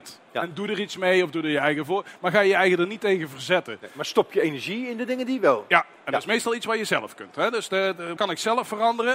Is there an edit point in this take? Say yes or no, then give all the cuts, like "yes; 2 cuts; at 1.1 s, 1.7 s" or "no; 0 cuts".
yes; 1 cut; at 8.2 s